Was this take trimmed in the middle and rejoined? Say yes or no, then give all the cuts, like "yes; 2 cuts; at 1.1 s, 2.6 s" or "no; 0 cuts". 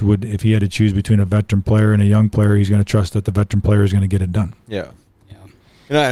yes; 1 cut; at 4.6 s